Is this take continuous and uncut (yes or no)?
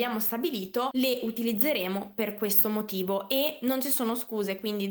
yes